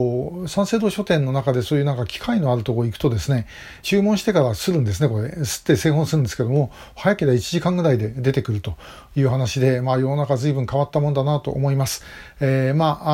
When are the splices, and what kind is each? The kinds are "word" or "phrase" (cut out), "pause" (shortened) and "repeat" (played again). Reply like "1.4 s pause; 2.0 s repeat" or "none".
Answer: 3.8 s phrase